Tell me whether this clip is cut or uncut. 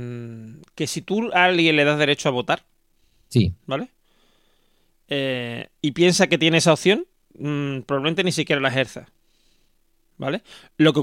uncut